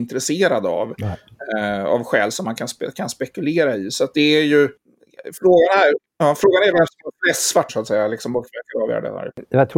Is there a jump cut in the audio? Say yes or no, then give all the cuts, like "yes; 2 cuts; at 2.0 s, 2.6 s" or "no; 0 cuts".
yes; 2 cuts; at 6.1 s, 7.7 s